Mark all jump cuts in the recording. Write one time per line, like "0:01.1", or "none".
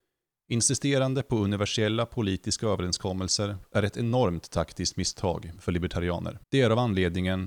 0:06.4